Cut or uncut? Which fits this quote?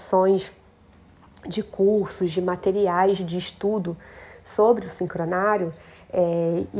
uncut